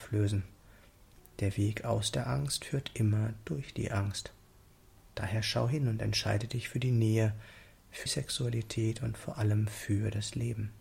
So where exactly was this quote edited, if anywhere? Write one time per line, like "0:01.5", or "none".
0:08.1